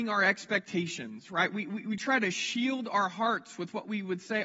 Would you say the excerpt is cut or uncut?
uncut